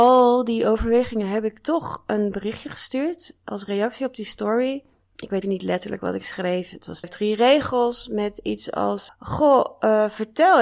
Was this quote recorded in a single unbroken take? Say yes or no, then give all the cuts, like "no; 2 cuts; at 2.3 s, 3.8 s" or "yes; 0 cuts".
no; 4 cuts; at 4.9 s, 5.4 s, 7.0 s, 9.1 s